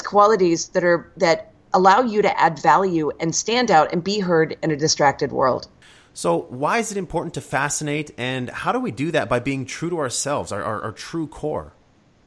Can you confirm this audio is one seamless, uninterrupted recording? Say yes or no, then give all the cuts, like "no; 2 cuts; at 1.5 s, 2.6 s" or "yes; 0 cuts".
yes; 0 cuts